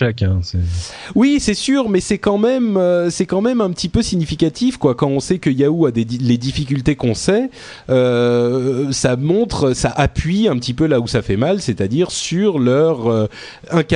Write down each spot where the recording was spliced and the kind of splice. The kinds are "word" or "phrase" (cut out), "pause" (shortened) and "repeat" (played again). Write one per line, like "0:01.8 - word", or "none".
none